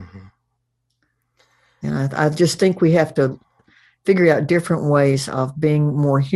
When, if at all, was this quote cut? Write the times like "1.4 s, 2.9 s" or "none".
none